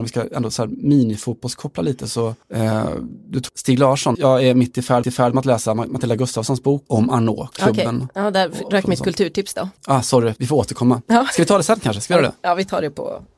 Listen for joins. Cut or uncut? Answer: cut